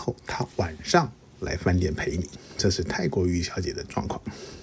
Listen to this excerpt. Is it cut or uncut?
uncut